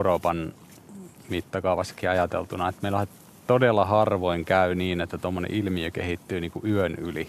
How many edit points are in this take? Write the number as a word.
zero